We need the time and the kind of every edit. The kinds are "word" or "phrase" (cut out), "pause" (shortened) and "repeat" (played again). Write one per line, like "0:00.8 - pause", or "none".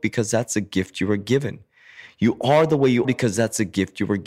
0:03.0 - word